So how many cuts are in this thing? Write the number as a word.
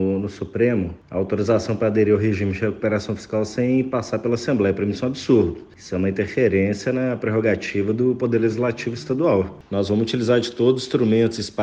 one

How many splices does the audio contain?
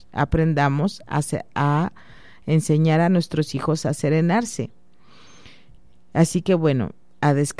zero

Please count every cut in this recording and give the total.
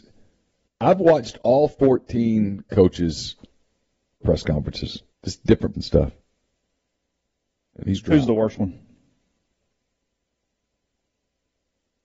four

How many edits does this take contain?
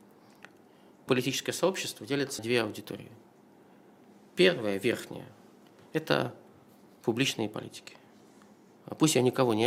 two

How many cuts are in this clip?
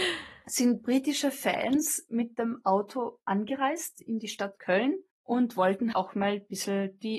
one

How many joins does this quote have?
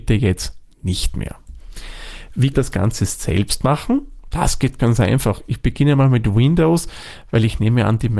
two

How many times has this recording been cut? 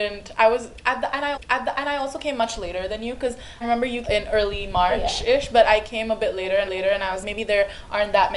five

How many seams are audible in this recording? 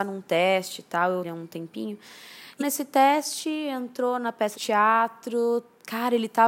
three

